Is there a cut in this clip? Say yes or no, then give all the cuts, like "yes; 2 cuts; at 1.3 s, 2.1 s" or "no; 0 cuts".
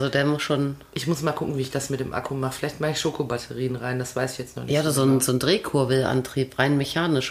no; 0 cuts